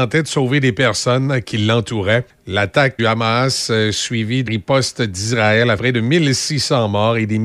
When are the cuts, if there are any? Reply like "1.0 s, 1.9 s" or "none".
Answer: 3.0 s, 4.5 s, 5.8 s